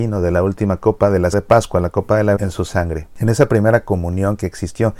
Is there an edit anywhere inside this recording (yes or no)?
yes